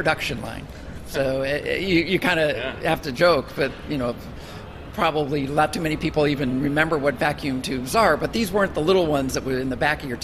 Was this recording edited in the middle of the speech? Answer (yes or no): no